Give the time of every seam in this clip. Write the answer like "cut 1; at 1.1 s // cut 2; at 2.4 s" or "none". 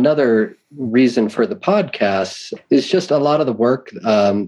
cut 1; at 2.6 s